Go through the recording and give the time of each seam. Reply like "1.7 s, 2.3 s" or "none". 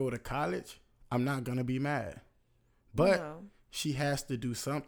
none